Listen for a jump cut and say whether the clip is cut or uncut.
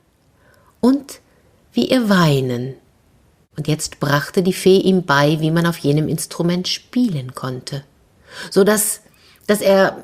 uncut